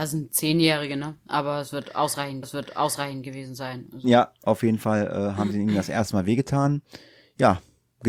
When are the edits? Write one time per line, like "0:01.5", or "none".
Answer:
0:02.4

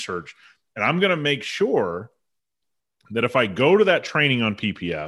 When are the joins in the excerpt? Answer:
none

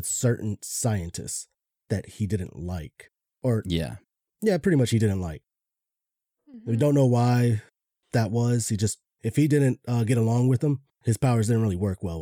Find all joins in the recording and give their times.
none

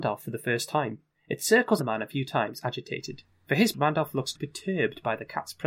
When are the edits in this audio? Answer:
0:01.1
0:01.8
0:03.7
0:04.4

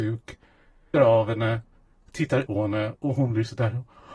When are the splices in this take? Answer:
0:00.9
0:02.5

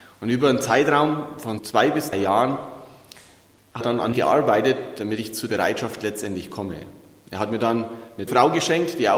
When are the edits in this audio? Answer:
0:01.6
0:02.1
0:03.8
0:04.1
0:05.5
0:08.3

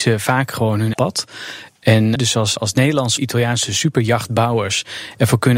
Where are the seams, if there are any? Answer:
0:00.9
0:02.2
0:02.6
0:03.2

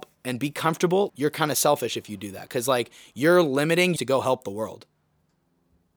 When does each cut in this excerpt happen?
0:01.1
0:04.0

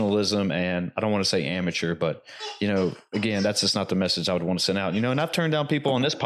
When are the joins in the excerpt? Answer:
none

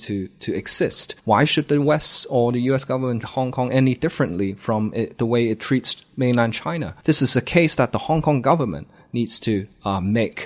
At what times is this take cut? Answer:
0:01.2
0:03.2
0:07.0

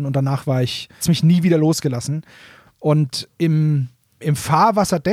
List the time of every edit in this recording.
0:01.0
0:04.2

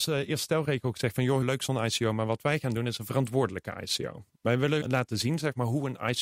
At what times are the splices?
0:01.4
0:04.8

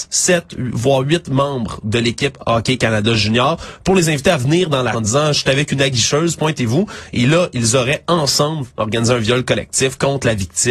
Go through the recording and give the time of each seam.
0:04.9

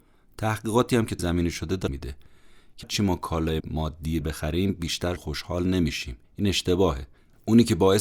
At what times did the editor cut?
0:01.2
0:01.9
0:02.8
0:03.6
0:04.2
0:05.2
0:06.2

